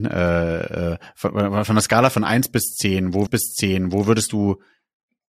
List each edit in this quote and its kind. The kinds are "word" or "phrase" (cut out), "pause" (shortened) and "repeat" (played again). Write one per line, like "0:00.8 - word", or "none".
0:03.3 - repeat